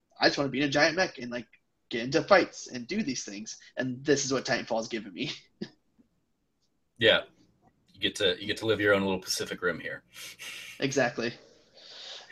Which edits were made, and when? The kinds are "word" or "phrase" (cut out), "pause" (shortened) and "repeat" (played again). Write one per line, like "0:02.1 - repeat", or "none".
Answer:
none